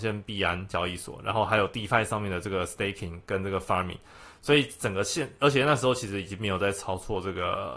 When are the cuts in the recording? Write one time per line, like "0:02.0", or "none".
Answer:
none